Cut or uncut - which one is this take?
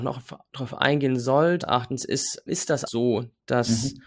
cut